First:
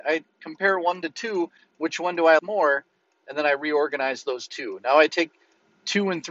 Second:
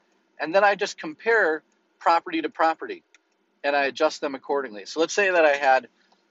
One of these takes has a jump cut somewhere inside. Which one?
first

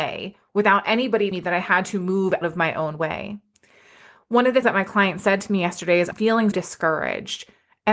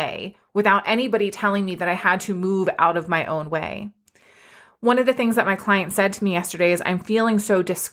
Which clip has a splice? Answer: first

